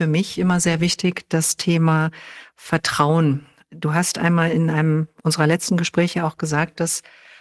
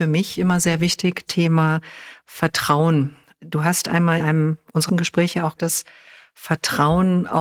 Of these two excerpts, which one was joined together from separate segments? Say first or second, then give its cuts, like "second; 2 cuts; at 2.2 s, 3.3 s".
second; 4 cuts; at 1.3 s, 4.2 s, 4.9 s, 5.6 s